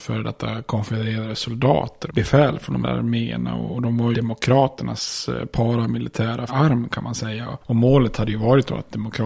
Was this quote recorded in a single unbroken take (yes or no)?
no